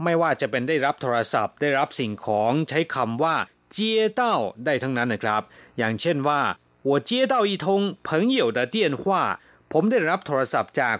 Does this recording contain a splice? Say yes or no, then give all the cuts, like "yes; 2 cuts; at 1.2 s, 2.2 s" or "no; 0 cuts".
no; 0 cuts